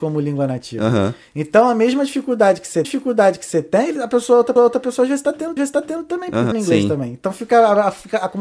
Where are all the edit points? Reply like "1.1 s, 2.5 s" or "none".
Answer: 2.8 s, 4.6 s, 5.6 s, 6.5 s